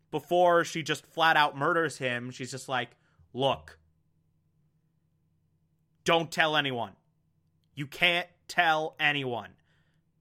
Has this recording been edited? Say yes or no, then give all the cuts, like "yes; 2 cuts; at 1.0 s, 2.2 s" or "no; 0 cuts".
no; 0 cuts